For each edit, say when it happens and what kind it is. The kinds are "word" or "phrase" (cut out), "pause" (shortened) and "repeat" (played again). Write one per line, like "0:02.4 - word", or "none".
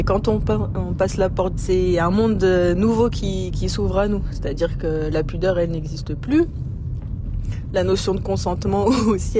0:01.5 - phrase